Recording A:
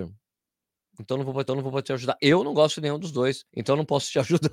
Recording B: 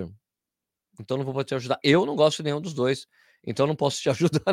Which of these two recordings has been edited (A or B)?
A